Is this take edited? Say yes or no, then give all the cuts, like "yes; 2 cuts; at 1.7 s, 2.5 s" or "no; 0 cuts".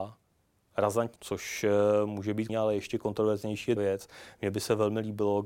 yes; 3 cuts; at 1.2 s, 2.5 s, 3.8 s